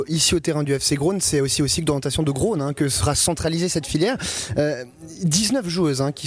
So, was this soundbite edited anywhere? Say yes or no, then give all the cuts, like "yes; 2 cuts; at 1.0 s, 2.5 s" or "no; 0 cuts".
no; 0 cuts